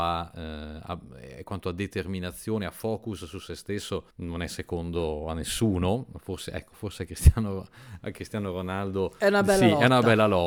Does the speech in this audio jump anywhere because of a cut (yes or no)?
yes